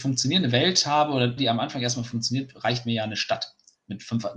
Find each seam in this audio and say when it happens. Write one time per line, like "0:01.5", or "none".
0:01.4